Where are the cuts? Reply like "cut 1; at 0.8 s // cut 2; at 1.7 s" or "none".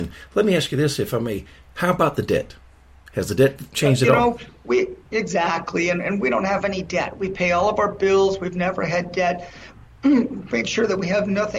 none